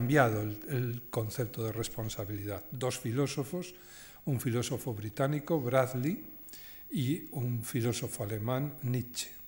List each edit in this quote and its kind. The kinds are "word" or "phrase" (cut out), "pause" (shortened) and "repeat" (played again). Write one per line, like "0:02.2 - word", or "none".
none